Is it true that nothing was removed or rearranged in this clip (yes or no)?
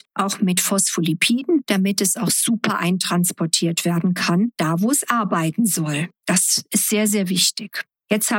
yes